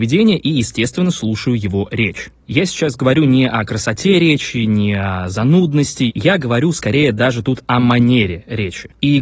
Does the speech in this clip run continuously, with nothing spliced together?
yes; 0 cuts

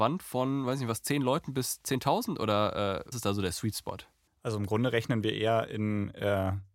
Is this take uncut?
no; 2 cuts; at 3.1 s, 4.3 s

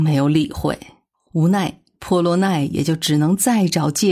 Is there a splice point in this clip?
yes; 1 cut; at 1.1 s

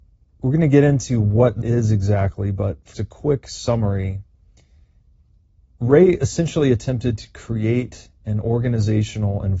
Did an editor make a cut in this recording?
yes; 2 cuts; at 1.6 s, 2.9 s

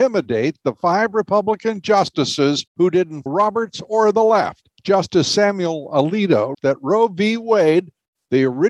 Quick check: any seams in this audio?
yes; 4 cuts; at 2.7 s, 3.3 s, 4.8 s, 6.5 s

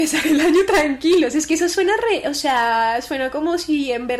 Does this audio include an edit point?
no; 0 cuts

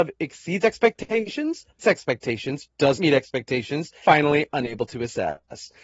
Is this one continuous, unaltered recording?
no; 3 cuts; at 1.8 s, 2.9 s, 4.0 s

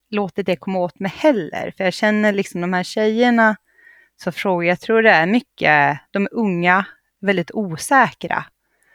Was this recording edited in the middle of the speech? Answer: no; 0 cuts

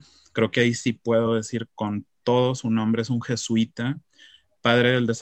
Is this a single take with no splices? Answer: yes; 0 cuts

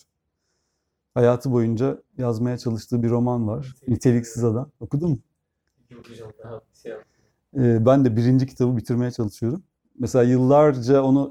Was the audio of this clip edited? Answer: no; 0 cuts

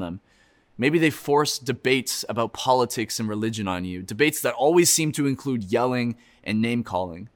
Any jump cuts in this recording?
no; 0 cuts

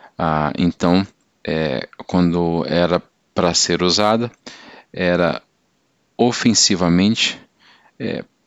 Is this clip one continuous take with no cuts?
yes; 0 cuts

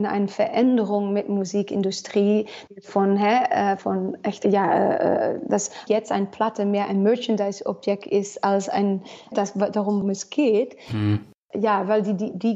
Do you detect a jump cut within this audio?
yes; 6 cuts; at 2.7 s, 3.8 s, 4.4 s, 5.9 s, 9.3 s, 10.0 s

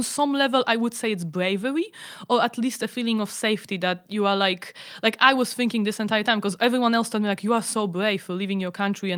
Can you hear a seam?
no; 0 cuts

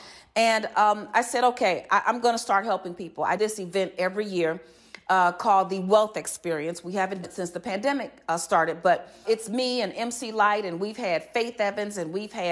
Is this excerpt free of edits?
no; 3 cuts; at 3.4 s, 7.2 s, 9.2 s

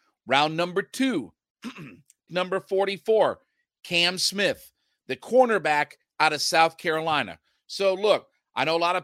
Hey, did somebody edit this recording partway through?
yes; 1 cut; at 2.3 s

